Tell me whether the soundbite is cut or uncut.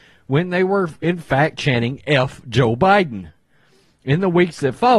uncut